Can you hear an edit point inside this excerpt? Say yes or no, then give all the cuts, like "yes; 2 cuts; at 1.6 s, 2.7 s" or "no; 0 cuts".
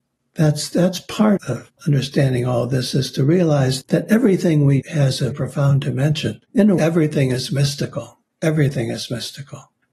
yes; 6 cuts; at 1.4 s, 1.7 s, 3.8 s, 4.8 s, 5.3 s, 6.8 s